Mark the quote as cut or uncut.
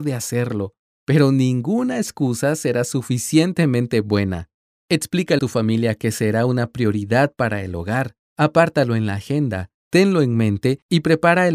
cut